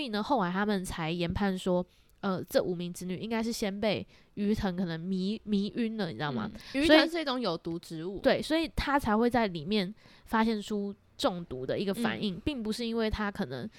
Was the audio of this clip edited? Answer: no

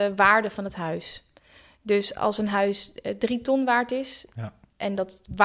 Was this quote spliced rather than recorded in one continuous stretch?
no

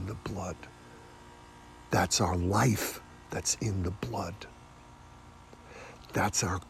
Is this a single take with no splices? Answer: yes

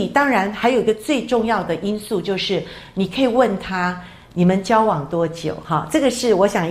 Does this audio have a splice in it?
no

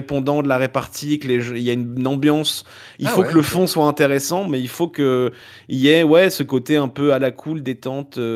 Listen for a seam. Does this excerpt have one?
no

